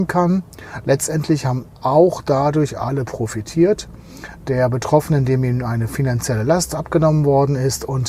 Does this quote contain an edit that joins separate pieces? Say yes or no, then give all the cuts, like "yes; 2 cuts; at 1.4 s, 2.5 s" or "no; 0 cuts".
no; 0 cuts